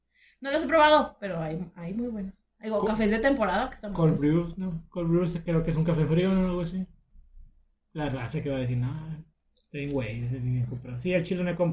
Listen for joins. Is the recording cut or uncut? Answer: uncut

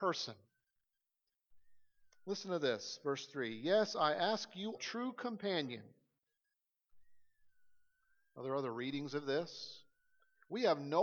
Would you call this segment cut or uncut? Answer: cut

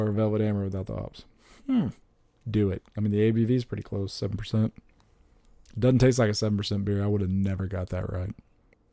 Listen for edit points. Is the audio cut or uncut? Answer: uncut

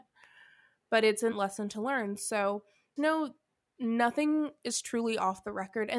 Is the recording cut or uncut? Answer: cut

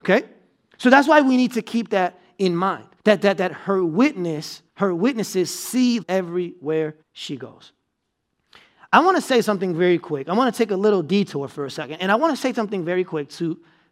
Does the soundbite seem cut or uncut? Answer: cut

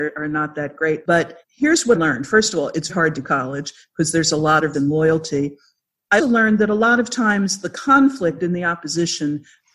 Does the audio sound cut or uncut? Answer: cut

